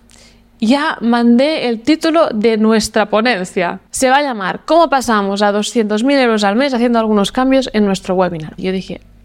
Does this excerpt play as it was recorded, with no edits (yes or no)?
no